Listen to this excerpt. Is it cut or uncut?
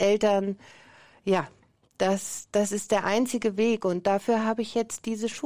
uncut